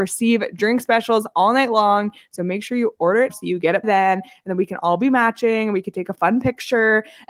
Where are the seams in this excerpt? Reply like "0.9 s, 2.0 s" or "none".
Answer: 3.3 s, 3.8 s